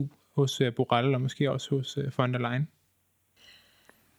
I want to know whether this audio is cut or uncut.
uncut